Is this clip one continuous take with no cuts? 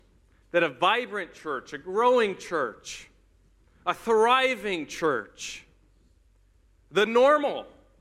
yes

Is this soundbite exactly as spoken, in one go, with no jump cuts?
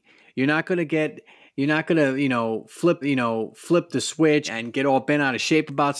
no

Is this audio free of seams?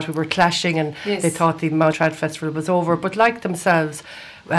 no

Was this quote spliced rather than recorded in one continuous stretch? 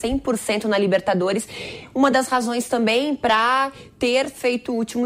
no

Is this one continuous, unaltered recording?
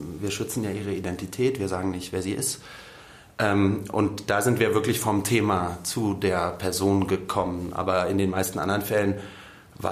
yes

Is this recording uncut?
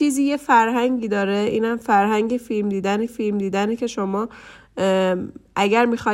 no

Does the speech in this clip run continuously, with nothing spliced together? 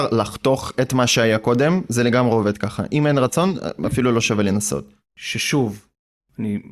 yes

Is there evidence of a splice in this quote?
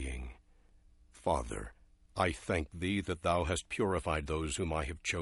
no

